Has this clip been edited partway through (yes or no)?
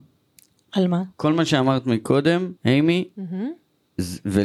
yes